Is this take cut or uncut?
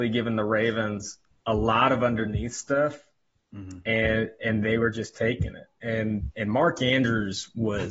uncut